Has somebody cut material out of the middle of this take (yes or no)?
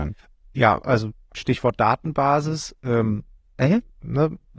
no